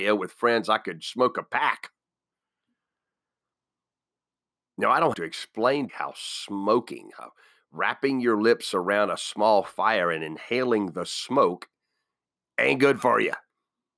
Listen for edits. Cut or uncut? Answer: cut